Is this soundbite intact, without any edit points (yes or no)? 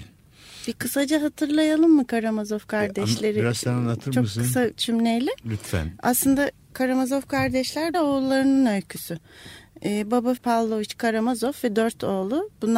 no